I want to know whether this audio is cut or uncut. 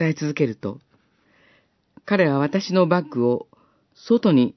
uncut